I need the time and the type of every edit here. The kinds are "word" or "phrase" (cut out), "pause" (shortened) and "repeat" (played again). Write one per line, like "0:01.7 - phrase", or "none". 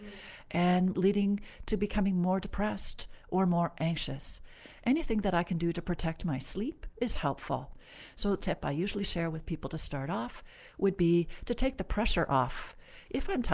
0:00.9 - word
0:08.4 - word